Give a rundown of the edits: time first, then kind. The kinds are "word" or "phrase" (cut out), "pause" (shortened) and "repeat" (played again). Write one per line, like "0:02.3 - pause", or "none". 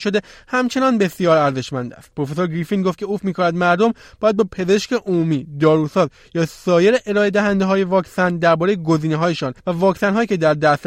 0:03.2 - word
0:09.6 - pause